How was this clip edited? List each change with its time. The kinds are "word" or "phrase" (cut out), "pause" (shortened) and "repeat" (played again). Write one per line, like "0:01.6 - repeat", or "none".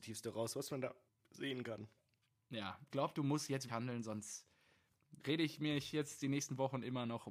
0:02.9 - phrase
0:03.7 - word
0:05.2 - pause